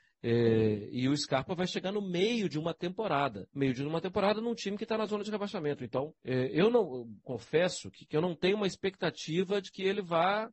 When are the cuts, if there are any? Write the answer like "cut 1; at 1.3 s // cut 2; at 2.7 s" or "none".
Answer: cut 1; at 3.5 s // cut 2; at 6.2 s